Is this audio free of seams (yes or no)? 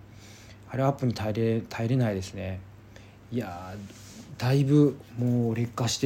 yes